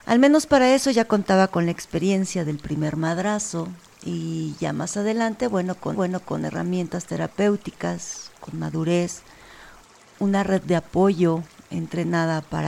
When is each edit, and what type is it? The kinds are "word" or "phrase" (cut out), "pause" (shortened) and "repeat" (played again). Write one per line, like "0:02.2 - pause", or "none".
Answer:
0:05.9 - repeat